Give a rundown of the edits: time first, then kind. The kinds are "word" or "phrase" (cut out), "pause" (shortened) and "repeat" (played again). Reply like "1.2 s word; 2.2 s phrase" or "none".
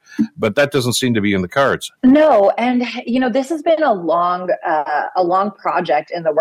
2.0 s pause